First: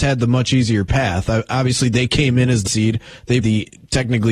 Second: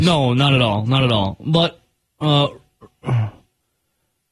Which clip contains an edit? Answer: first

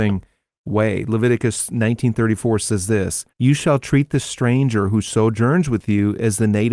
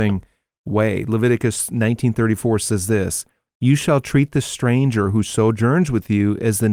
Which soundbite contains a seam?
first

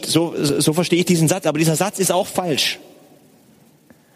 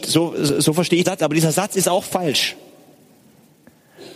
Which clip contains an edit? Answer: second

